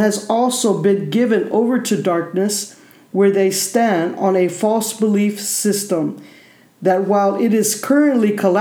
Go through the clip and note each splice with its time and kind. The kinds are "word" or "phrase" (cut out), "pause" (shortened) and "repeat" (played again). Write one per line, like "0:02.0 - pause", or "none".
none